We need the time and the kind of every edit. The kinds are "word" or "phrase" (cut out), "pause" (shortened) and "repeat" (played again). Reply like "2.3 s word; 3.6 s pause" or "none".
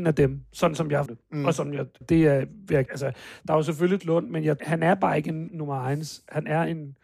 1.1 s word; 2.0 s word; 2.9 s word; 4.0 s word; 4.6 s word; 5.5 s word

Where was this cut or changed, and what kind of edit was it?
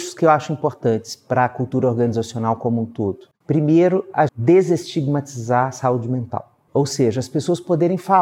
3.3 s pause; 4.3 s word

